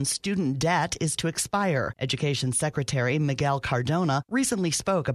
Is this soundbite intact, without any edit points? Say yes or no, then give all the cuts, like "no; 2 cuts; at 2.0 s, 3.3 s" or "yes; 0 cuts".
yes; 0 cuts